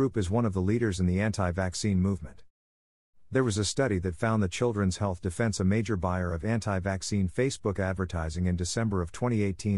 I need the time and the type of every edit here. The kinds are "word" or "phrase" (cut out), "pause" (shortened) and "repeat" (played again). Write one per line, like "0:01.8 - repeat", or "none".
none